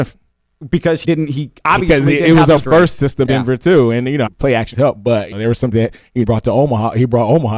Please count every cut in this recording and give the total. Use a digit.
8